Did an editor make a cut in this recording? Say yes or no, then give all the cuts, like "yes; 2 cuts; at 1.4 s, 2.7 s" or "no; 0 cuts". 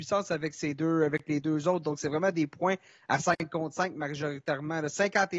no; 0 cuts